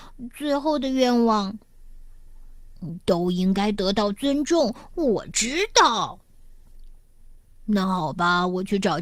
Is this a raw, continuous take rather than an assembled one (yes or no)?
no